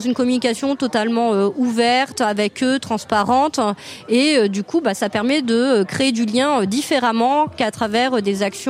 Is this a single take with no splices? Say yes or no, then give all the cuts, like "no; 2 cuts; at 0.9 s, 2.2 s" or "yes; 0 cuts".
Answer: yes; 0 cuts